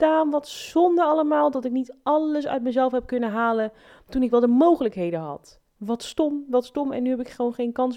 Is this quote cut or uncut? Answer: uncut